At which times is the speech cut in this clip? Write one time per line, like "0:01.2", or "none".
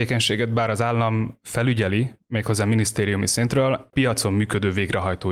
0:03.9